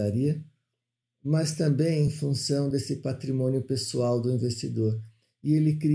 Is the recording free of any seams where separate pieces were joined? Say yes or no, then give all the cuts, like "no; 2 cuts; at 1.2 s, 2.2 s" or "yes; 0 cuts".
yes; 0 cuts